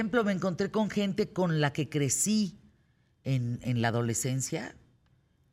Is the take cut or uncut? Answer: uncut